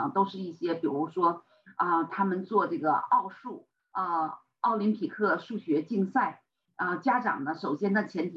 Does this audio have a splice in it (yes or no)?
no